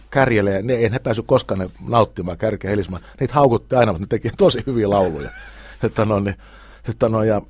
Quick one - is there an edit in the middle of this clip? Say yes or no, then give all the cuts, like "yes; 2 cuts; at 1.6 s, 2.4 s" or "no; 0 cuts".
no; 0 cuts